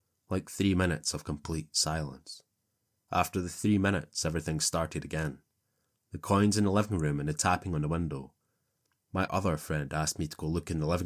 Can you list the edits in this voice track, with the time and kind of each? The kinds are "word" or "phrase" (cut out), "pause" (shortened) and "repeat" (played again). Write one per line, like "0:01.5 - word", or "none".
0:09.3 - word

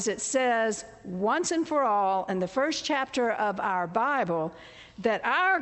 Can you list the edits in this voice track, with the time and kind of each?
none

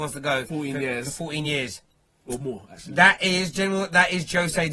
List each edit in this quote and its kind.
none

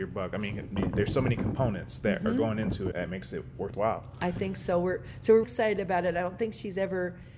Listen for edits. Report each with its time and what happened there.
0:02.9 - word
0:05.4 - word

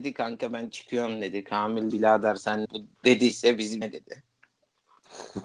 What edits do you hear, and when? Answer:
0:01.9 - word
0:02.6 - phrase
0:03.3 - word
0:03.8 - phrase

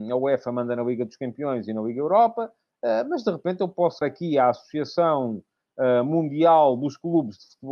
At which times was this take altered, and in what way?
0:04.0 - word

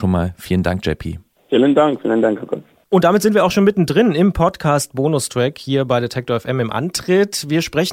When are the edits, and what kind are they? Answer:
none

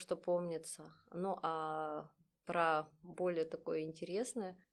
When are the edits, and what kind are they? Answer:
none

